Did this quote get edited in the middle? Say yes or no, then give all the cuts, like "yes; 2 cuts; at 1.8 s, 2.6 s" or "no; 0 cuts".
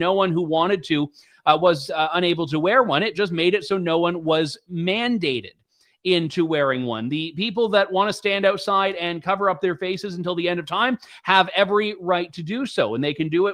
no; 0 cuts